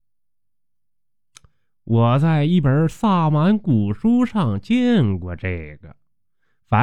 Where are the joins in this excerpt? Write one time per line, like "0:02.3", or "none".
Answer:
none